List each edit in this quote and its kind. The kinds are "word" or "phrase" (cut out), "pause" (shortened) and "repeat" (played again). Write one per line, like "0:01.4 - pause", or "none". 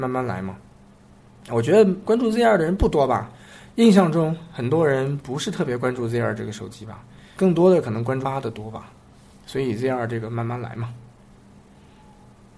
0:07.4 - word
0:08.2 - word